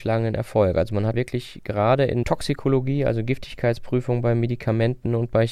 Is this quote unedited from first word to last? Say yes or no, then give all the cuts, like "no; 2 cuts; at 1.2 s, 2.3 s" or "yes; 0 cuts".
no; 2 cuts; at 1.1 s, 2.2 s